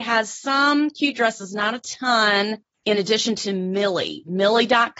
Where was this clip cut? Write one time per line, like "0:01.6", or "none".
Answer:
none